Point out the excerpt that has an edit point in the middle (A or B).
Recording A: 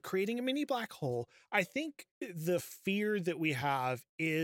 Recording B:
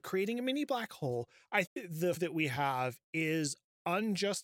B